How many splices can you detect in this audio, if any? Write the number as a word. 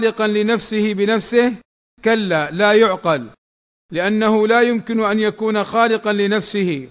zero